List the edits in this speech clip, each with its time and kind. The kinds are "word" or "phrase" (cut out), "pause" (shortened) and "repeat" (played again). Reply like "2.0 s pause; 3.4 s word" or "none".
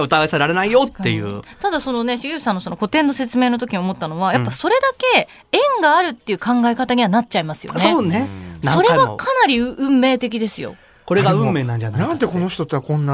none